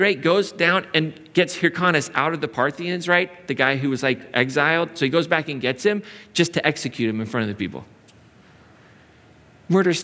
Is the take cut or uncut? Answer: uncut